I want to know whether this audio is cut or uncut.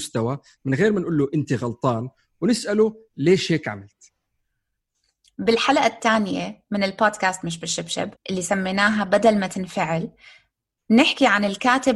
cut